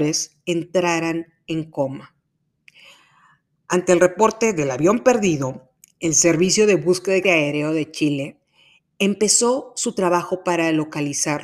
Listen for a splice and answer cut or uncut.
cut